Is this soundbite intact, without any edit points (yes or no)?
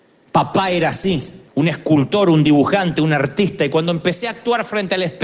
no